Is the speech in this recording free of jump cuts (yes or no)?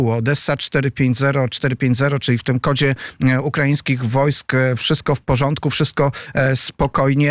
yes